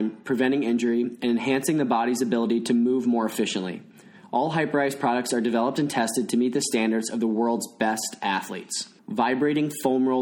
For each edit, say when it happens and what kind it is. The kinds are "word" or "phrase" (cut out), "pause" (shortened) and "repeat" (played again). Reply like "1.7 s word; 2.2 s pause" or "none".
9.0 s pause

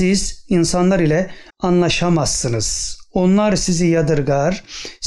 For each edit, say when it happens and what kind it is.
1.5 s pause

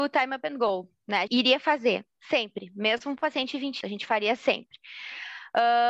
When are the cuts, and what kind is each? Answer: 1.3 s word; 3.8 s word

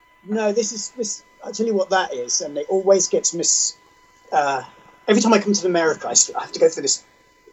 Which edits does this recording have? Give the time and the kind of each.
none

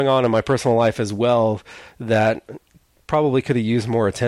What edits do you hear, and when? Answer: none

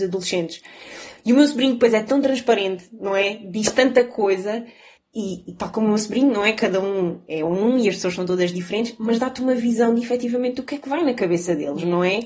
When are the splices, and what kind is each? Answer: 4.9 s pause

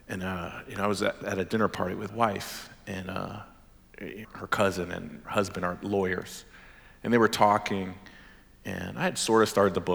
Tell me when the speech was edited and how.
1.2 s word; 2.1 s word; 4.2 s word; 5.2 s word

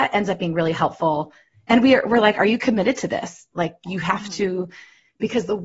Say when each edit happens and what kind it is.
none

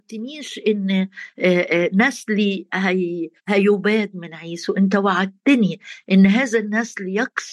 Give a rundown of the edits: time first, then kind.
3.4 s pause

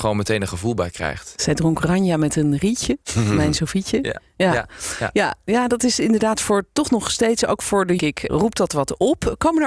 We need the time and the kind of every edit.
3.0 s pause; 8.0 s phrase; 8.3 s word

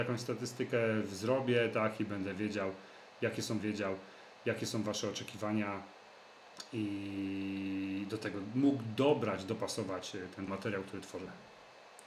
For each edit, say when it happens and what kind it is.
3.6 s repeat; 10.5 s phrase

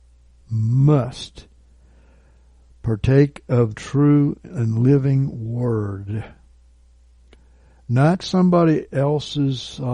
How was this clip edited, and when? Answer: 3.7 s word; 8.2 s word

